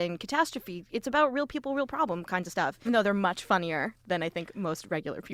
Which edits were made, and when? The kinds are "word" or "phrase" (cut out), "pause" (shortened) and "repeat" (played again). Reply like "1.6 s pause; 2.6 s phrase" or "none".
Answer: 2.9 s word